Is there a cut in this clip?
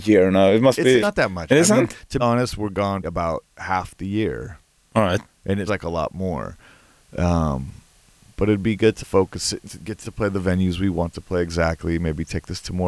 yes; 8 cuts; at 1.0 s, 1.5 s, 2.2 s, 3.0 s, 5.7 s, 9.0 s, 9.6 s, 10.0 s

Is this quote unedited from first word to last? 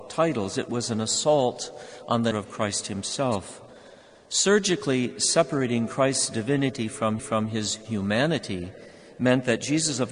no; 2 cuts; at 2.3 s, 7.2 s

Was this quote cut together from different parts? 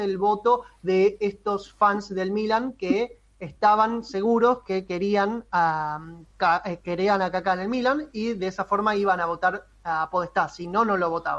no; 0 cuts

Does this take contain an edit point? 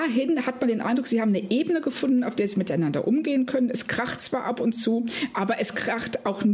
no; 0 cuts

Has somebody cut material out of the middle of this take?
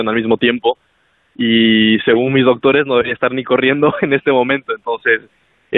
no; 0 cuts

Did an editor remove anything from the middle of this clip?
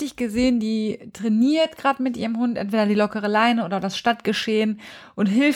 no; 0 cuts

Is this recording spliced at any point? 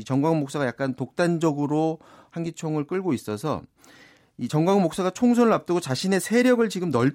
no; 0 cuts

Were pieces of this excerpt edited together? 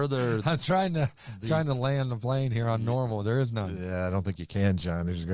no; 0 cuts

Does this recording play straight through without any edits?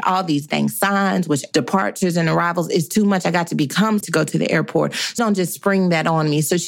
no; 3 cuts; at 1.5 s, 4.0 s, 5.2 s

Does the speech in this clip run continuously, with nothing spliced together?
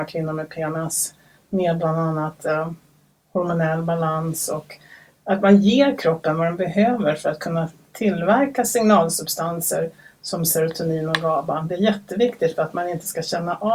yes; 0 cuts

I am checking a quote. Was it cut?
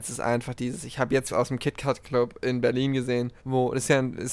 yes; 2 cuts; at 1.3 s, 3.4 s

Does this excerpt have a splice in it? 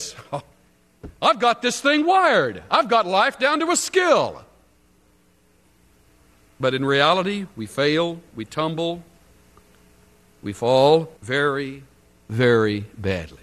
yes; 1 cut; at 11.2 s

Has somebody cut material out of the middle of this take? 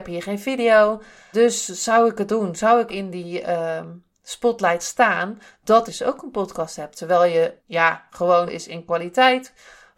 yes; 7 cuts; at 1.3 s, 2.3 s, 2.9 s, 4.8 s, 5.9 s, 7.6 s, 8.5 s

